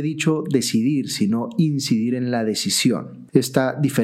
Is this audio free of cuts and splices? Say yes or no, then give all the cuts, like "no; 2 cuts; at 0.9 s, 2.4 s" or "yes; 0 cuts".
yes; 0 cuts